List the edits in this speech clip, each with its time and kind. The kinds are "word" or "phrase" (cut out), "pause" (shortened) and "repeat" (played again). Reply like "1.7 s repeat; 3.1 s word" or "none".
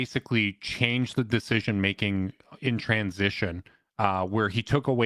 none